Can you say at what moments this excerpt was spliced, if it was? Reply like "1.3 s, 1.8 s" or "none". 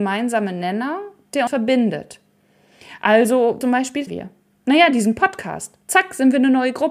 1.5 s, 3.6 s, 4.1 s